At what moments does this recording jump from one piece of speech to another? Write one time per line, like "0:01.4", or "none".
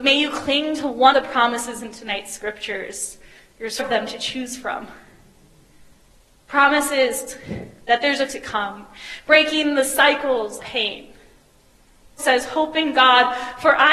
0:01.1
0:03.8
0:08.3
0:10.6
0:12.2

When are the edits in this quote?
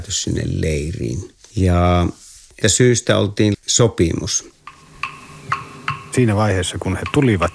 0:02.6
0:03.5

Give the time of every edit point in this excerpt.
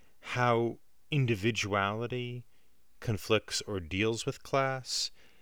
none

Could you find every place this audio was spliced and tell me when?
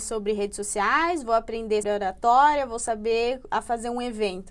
0:01.8

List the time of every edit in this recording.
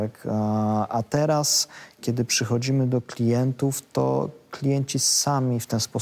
0:02.0

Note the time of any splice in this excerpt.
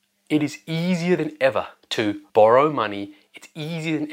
0:02.3

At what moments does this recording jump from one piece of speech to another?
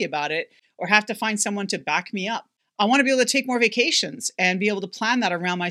none

